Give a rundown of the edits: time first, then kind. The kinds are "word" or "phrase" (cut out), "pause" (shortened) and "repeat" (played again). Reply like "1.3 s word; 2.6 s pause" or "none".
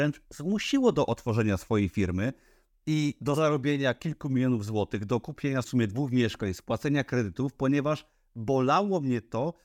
5.6 s word